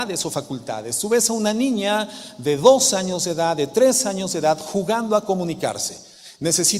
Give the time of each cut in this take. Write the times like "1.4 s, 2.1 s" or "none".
none